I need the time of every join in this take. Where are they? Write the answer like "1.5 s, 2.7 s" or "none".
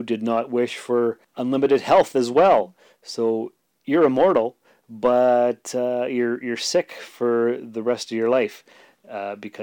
none